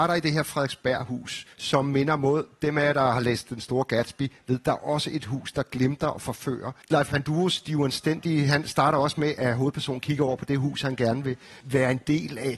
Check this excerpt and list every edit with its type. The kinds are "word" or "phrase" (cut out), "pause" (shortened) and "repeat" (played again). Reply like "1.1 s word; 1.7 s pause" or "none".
1.5 s pause; 6.8 s pause; 9.4 s word